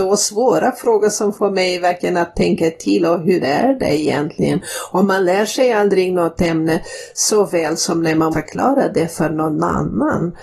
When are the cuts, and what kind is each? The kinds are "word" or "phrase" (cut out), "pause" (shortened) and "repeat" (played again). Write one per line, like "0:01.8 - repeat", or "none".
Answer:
0:08.3 - word